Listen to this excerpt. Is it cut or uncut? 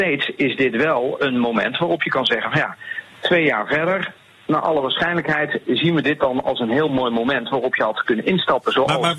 uncut